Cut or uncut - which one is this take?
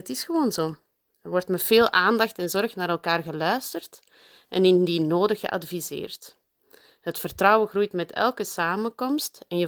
uncut